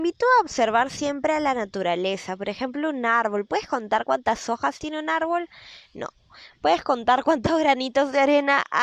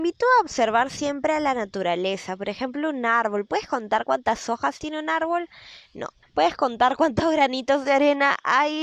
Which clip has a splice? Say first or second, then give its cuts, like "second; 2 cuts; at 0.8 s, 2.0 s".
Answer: second; 1 cut; at 6.2 s